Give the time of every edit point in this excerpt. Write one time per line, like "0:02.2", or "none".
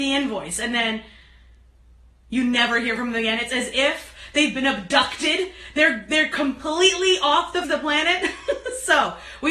0:07.6